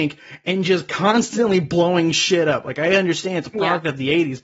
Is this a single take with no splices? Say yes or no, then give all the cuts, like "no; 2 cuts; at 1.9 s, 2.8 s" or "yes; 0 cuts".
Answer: yes; 0 cuts